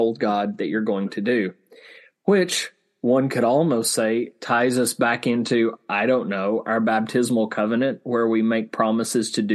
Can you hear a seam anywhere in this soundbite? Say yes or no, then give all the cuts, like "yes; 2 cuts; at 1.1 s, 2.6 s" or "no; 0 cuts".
no; 0 cuts